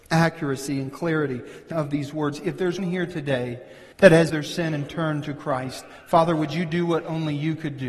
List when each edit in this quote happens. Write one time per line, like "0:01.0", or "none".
0:01.7
0:02.8
0:03.9
0:04.3

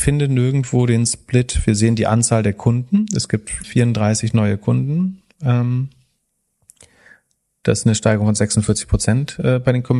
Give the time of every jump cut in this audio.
0:03.6
0:07.8

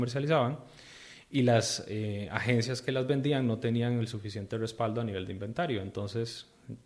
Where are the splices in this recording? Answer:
none

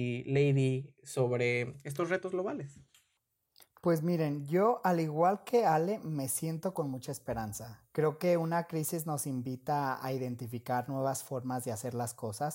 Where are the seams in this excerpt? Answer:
none

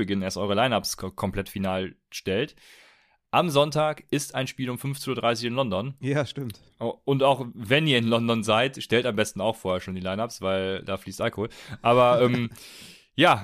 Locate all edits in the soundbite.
none

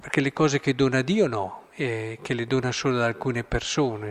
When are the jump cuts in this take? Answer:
0:01.7

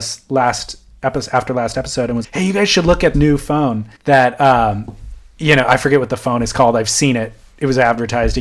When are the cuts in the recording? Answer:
0:02.2
0:03.1
0:04.0

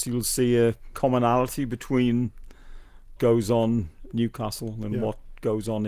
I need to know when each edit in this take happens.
0:00.9
0:03.2
0:04.1

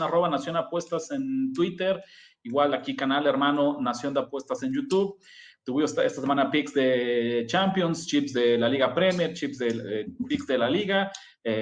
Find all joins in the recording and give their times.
none

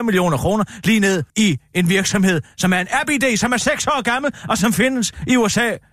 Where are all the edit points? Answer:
0:01.3

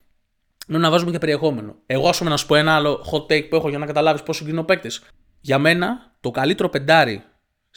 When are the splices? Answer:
0:05.1

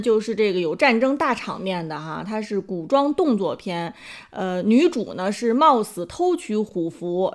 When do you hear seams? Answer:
none

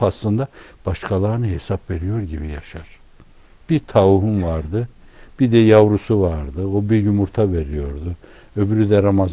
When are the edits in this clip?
none

